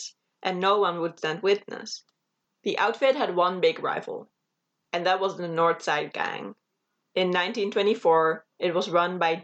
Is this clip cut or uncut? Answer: uncut